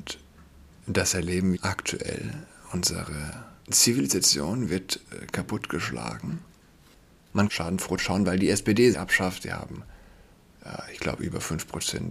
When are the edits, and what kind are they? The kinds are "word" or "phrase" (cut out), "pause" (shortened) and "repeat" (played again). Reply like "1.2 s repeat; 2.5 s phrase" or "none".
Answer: 1.5 s word; 3.6 s pause; 7.5 s word; 8.0 s word; 8.9 s phrase